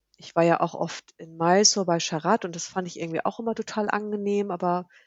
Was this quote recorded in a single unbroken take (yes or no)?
yes